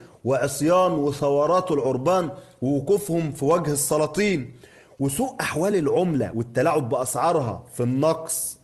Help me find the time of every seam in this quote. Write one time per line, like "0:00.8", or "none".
none